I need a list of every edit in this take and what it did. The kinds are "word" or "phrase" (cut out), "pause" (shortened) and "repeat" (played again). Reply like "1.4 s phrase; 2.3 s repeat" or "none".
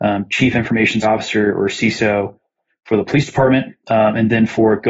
1.0 s word; 3.8 s pause